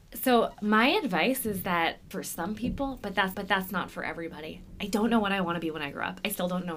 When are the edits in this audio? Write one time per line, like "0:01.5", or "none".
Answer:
0:02.1
0:03.3

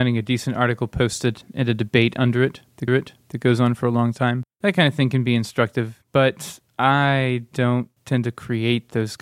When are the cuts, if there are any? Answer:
0:02.9

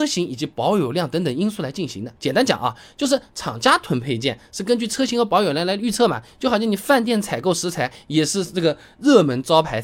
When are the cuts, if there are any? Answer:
0:02.2

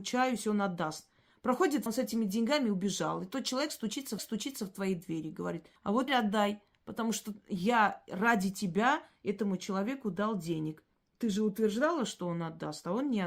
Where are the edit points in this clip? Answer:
0:01.9
0:04.2
0:05.8
0:06.1
0:10.9

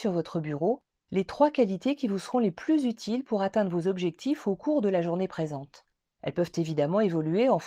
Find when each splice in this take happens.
none

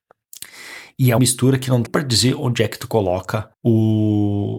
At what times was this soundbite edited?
0:01.2
0:01.9
0:03.5

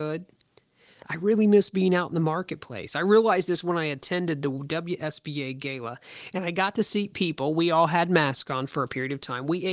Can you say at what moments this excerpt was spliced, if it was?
none

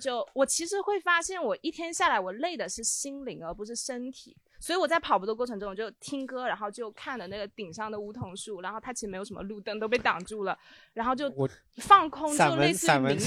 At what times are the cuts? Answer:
none

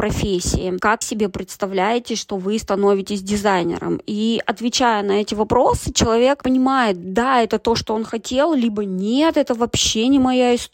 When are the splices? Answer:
0:01.0

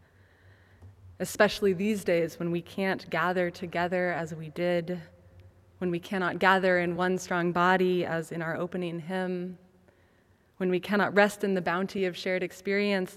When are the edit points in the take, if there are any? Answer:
none

